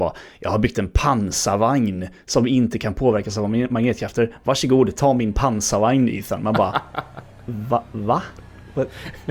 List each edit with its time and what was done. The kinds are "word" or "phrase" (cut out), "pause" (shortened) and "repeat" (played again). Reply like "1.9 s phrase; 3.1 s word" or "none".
none